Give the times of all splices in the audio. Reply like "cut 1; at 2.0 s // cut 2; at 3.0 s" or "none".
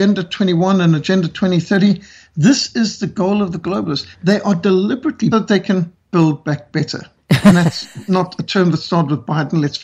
cut 1; at 4.1 s // cut 2; at 5.3 s // cut 3; at 6.0 s